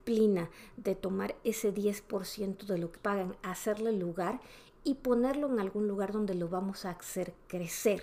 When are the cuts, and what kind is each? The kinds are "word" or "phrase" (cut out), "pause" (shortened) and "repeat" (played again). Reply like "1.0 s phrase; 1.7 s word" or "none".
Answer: 3.0 s word